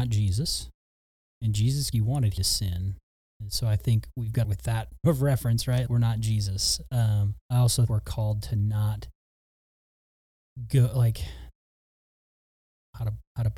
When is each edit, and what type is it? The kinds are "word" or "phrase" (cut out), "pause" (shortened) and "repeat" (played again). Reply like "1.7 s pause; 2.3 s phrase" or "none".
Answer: 1.0 s pause; 1.9 s phrase; 2.4 s phrase; 4.4 s phrase; 5.0 s word; 5.9 s word; 7.4 s pause; 7.9 s word